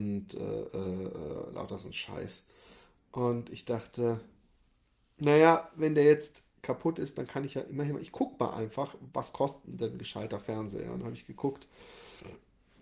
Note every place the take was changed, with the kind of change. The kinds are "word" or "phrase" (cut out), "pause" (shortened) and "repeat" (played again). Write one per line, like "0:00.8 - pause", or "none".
none